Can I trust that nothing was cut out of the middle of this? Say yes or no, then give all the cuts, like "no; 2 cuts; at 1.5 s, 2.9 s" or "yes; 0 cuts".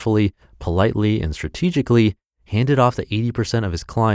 yes; 0 cuts